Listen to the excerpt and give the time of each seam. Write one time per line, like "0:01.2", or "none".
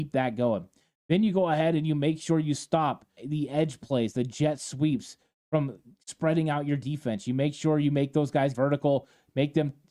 0:03.2
0:08.5

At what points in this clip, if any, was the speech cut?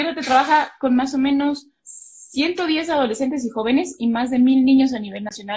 none

